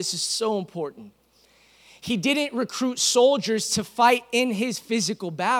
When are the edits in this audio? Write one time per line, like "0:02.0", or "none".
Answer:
none